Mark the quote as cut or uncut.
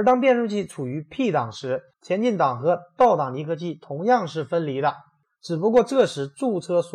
cut